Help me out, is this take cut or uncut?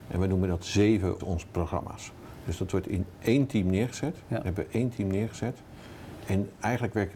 cut